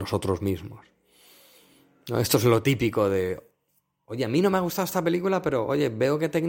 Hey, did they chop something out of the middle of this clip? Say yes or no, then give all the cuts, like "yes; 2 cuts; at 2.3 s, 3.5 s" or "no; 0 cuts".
no; 0 cuts